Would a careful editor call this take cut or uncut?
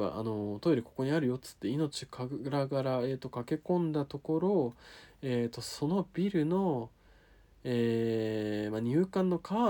uncut